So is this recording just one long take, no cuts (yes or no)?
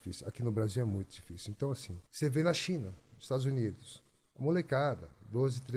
no